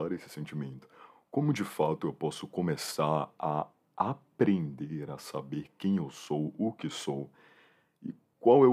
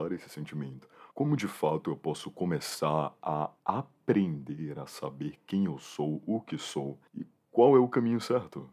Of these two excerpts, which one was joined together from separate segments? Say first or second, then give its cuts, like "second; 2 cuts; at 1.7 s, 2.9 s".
second; 3 cuts; at 1.1 s, 3.6 s, 7.1 s